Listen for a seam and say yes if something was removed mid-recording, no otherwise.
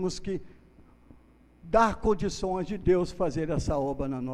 no